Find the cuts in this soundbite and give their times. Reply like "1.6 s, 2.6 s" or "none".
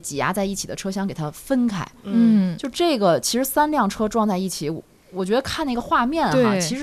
none